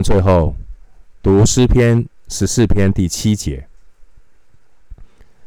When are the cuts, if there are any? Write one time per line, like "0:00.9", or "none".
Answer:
0:02.2